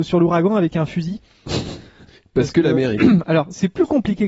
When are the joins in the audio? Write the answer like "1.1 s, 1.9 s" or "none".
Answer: none